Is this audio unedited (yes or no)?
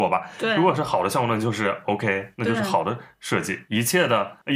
yes